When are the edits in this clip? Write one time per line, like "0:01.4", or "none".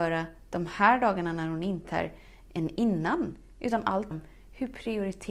0:01.8
0:04.1